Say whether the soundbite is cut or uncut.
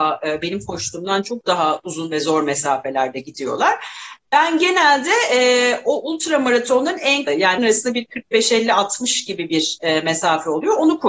cut